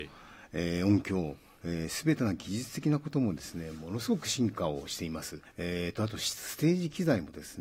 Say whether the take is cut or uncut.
cut